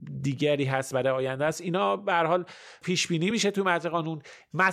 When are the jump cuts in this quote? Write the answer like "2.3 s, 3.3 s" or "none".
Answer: none